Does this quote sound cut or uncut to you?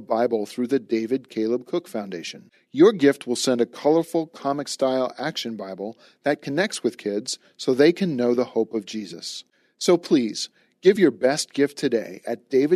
uncut